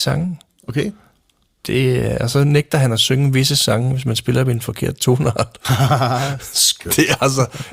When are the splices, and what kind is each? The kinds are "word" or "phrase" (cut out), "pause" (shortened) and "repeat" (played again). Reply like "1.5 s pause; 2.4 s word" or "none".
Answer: none